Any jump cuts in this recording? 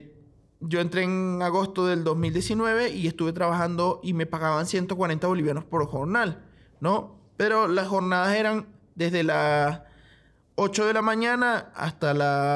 no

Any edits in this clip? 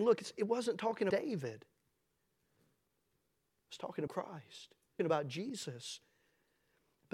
yes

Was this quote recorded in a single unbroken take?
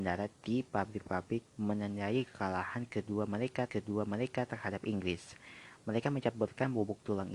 no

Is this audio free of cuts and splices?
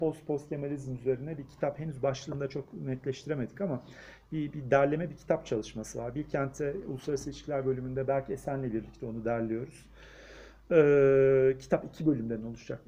yes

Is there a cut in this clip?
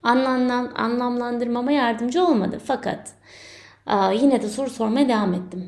no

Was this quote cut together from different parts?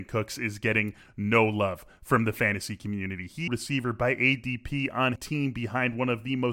yes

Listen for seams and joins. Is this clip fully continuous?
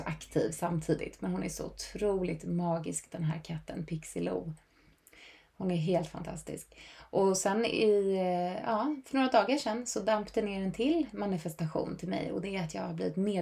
yes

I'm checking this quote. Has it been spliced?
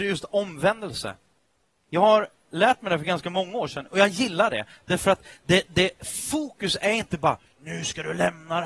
no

